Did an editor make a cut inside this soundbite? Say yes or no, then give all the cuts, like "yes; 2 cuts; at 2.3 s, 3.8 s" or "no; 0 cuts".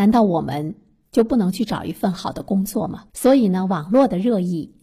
yes; 1 cut; at 3.1 s